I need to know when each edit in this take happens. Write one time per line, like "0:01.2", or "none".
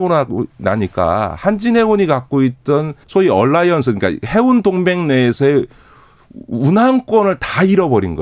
0:03.0

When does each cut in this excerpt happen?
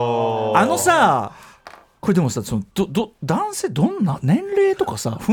none

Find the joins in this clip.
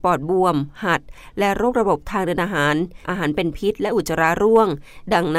0:03.0

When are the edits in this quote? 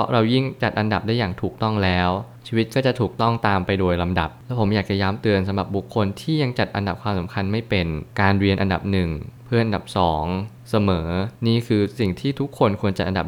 0:08.1
0:11.4

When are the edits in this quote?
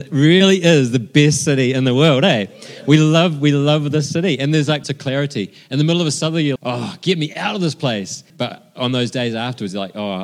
0:04.8
0:06.6
0:08.3

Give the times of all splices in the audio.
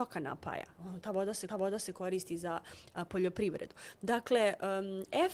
0:01.5

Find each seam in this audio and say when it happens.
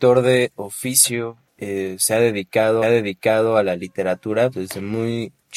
0:01.5
0:02.8
0:04.5

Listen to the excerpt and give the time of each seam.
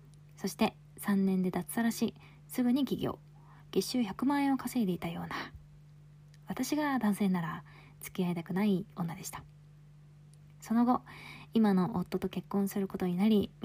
none

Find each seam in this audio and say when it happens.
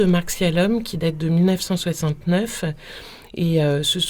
none

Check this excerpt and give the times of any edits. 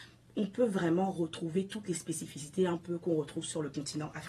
none

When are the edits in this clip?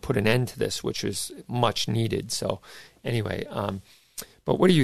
none

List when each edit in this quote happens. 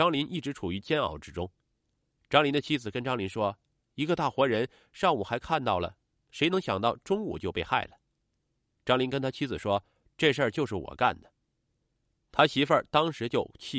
none

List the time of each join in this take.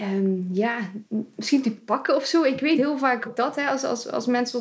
0:01.6
0:02.7
0:03.2

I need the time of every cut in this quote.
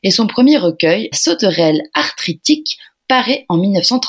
0:01.1

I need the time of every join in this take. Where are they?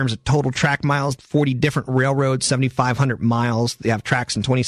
0:01.2

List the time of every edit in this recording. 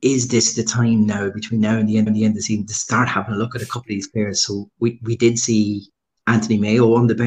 0:02.1

